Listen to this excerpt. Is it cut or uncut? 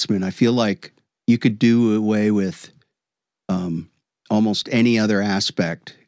uncut